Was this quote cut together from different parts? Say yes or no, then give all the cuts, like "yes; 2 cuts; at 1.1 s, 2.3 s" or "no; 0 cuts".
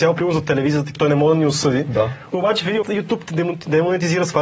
yes; 2 cuts; at 1.0 s, 2.8 s